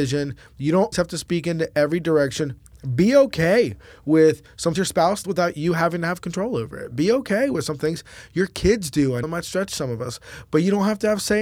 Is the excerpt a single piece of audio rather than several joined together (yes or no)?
no